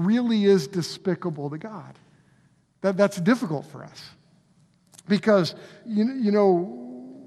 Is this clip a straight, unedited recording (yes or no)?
yes